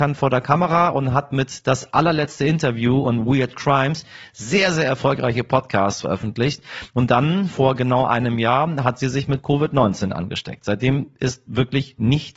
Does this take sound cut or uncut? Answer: uncut